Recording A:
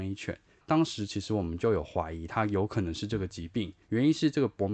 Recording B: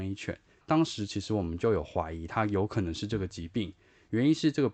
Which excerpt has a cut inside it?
A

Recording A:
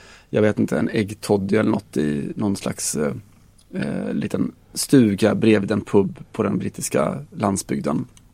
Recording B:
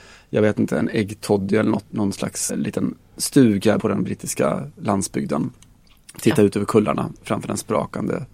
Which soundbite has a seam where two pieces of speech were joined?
B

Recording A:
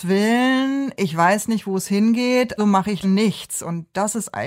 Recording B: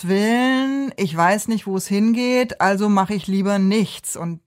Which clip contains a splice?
A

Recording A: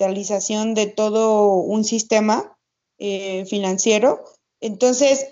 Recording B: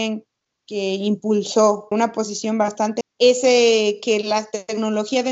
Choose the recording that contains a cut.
B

